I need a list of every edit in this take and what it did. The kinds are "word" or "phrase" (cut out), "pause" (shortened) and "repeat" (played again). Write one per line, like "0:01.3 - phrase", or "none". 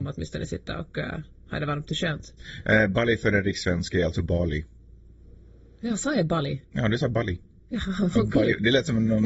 none